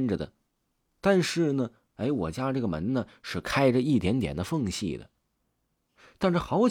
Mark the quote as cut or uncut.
uncut